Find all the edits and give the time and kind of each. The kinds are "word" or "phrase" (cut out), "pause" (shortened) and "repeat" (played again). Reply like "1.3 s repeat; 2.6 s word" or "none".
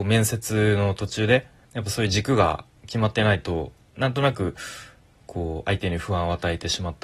1.6 s pause

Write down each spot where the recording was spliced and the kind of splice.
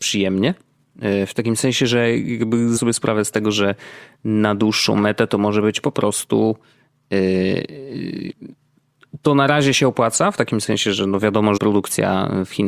2.8 s word; 11.6 s word

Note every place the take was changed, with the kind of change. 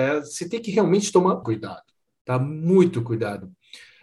1.4 s word

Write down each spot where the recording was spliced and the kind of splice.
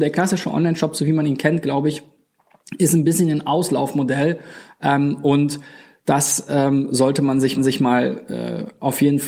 7.6 s repeat

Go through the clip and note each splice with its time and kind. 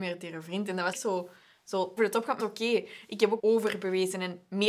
0.9 s phrase; 2.0 s word; 2.4 s word; 3.4 s phrase

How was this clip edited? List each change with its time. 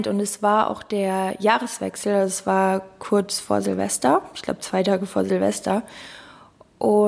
none

